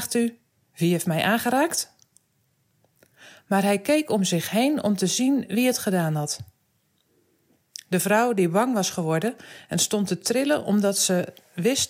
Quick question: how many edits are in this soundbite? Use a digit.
0